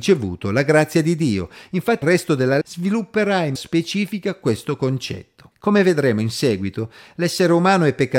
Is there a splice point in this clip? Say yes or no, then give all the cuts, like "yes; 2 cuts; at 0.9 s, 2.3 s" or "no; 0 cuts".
yes; 4 cuts; at 2.0 s, 2.6 s, 3.6 s, 5.5 s